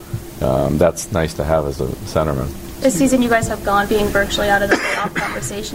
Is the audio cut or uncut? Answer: cut